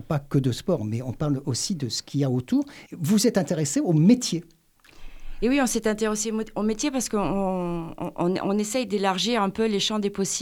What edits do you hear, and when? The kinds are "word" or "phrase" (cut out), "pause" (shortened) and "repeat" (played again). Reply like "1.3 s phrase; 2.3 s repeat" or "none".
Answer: 2.9 s pause